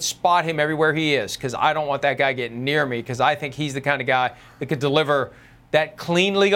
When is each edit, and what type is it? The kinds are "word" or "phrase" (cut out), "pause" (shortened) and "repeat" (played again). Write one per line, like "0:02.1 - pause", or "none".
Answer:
none